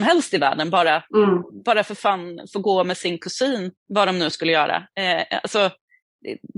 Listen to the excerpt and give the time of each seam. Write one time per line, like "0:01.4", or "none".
0:03.8